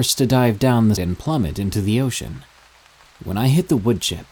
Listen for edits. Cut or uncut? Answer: cut